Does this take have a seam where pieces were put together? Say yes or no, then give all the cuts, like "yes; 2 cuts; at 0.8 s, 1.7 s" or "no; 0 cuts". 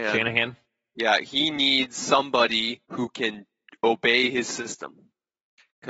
yes; 1 cut; at 2.8 s